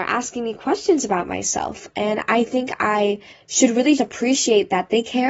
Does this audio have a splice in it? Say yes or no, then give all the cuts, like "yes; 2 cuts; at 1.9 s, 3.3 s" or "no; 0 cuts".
yes; 2 cuts; at 3.3 s, 4.0 s